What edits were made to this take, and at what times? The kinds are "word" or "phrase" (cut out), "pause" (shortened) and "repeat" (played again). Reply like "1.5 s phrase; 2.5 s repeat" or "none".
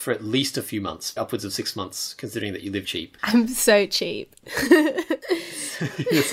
1.2 s word; 2.8 s word; 3.2 s pause